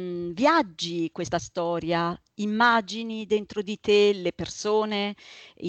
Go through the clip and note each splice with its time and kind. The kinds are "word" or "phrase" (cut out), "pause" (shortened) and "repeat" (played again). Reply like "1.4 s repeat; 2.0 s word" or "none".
1.1 s word

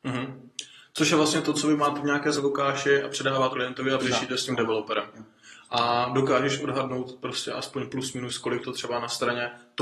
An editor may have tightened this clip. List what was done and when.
2.3 s word; 3.5 s word; 4.0 s word; 8.6 s word

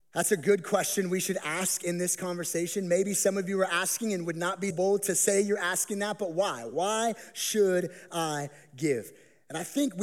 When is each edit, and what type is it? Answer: 4.7 s word

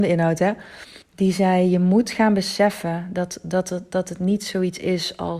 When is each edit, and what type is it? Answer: 1.0 s pause

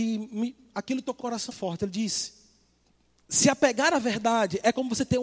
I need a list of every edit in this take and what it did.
1.2 s word; 1.5 s word; 2.8 s pause

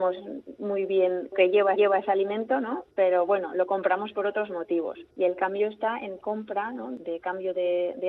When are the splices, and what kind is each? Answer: 1.3 s phrase; 1.8 s repeat; 2.9 s pause; 5.1 s pause; 6.2 s phrase

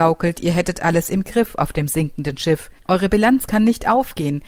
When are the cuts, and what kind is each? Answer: 2.8 s pause

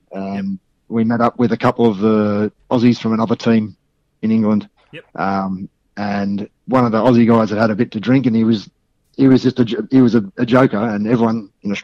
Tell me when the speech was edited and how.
5.1 s pause; 6.6 s pause

